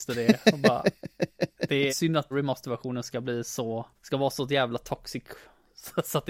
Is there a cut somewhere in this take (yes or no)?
yes